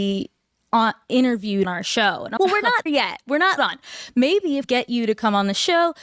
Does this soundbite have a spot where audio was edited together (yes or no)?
yes